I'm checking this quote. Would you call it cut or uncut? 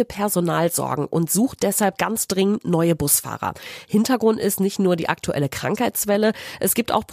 uncut